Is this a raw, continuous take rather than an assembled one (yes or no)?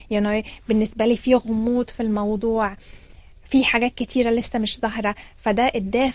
yes